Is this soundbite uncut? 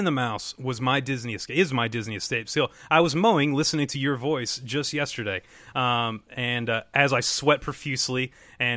yes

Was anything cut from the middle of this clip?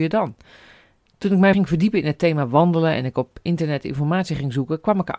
yes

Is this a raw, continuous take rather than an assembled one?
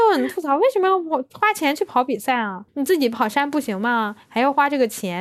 no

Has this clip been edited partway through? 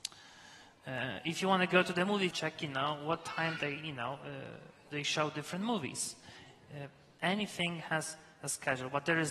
yes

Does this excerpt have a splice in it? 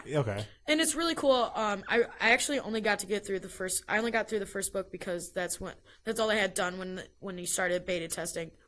no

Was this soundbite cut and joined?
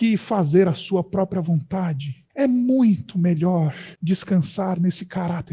yes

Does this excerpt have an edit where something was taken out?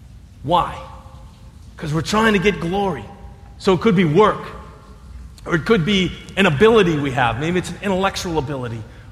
no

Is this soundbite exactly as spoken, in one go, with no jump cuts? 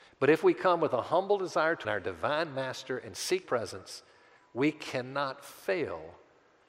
no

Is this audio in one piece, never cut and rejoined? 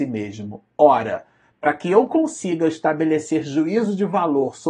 yes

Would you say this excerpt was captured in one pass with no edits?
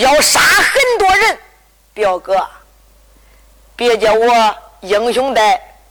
yes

